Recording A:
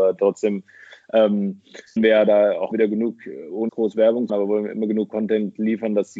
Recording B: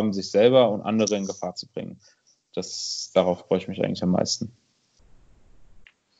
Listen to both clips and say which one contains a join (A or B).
A